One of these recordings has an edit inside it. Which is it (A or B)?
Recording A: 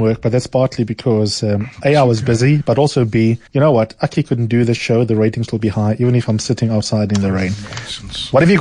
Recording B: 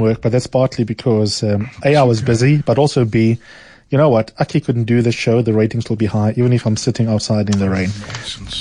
A